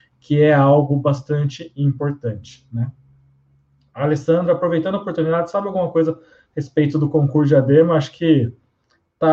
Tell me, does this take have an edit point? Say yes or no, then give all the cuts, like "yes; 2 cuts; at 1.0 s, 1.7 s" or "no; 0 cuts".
no; 0 cuts